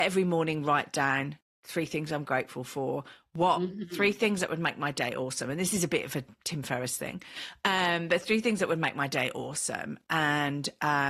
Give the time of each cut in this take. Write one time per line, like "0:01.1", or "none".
none

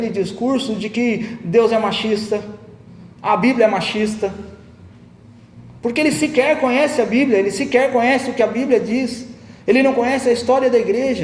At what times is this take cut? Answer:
none

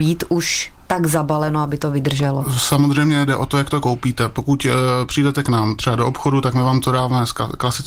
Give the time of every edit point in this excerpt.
none

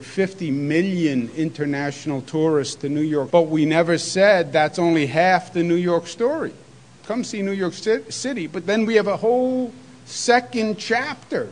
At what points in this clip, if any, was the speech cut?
0:03.3

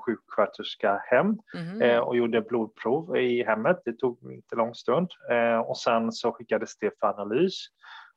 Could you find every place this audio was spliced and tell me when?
0:01.5

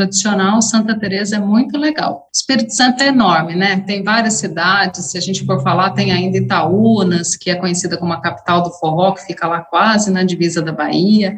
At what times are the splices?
0:02.3

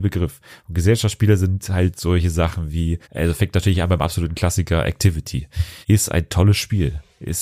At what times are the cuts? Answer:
0:03.0
0:05.8

